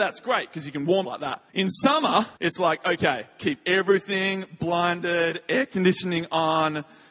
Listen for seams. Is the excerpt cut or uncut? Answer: cut